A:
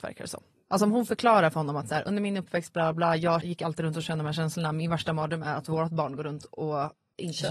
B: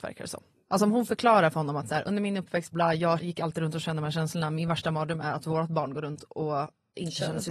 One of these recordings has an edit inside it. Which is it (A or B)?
B